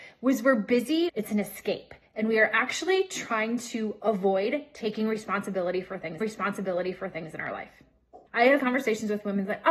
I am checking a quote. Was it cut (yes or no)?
yes